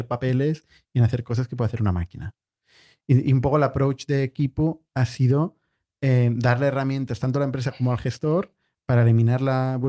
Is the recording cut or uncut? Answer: uncut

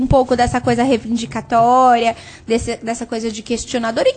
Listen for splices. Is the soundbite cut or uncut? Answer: uncut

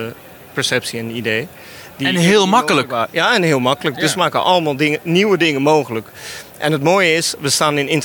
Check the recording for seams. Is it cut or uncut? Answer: uncut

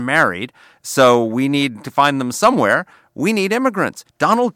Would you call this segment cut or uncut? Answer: uncut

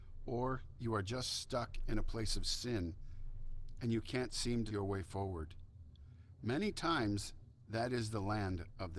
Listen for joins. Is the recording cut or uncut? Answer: cut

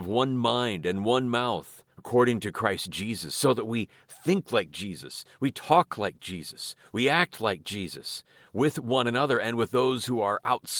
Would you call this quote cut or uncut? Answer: cut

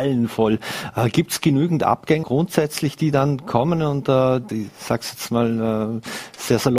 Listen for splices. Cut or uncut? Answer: cut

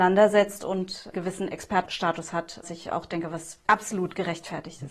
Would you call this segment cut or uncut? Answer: cut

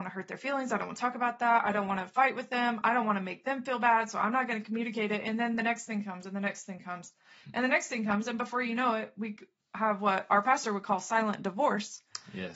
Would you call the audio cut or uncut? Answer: uncut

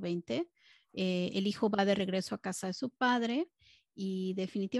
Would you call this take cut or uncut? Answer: uncut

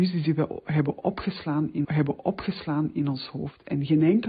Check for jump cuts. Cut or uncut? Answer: cut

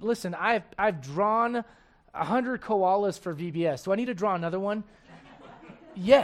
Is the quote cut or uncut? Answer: uncut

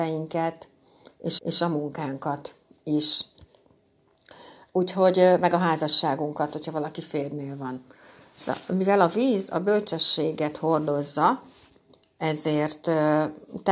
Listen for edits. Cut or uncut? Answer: cut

